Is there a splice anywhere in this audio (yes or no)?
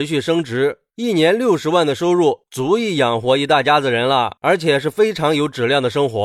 yes